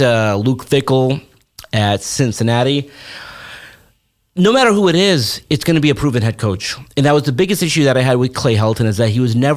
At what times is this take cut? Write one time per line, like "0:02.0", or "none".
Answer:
none

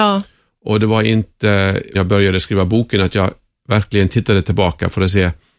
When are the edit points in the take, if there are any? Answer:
0:01.9

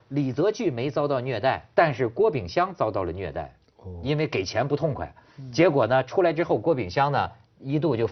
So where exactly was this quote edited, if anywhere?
0:01.7

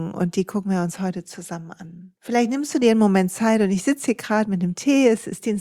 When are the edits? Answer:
0:02.2

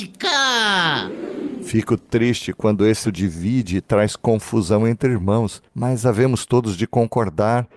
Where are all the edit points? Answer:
0:03.0
0:05.7

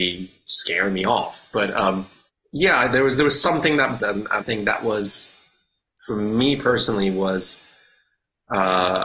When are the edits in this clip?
0:02.3
0:04.0
0:04.4

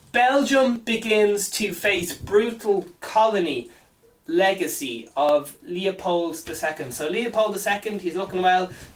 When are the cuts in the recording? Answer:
0:03.0

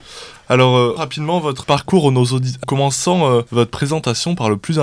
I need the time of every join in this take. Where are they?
0:01.0
0:01.6
0:02.6
0:03.5

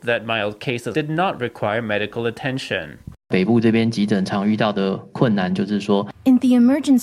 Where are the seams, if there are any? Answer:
0:00.9
0:03.2

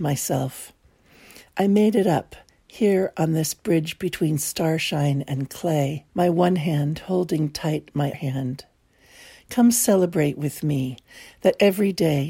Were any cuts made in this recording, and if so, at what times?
0:06.1
0:08.1

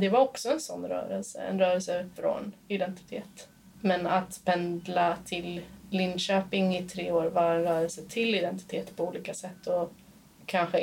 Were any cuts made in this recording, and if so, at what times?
0:02.2

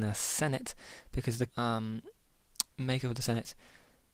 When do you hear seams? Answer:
0:01.5

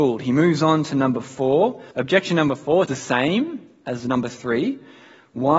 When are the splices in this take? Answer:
0:01.9
0:02.9

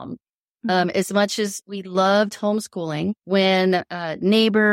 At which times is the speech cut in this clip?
0:03.2

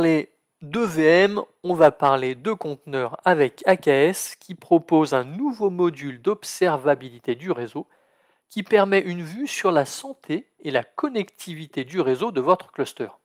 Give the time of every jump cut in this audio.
none

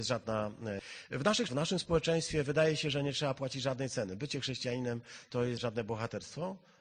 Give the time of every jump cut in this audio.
0:01.5
0:05.6

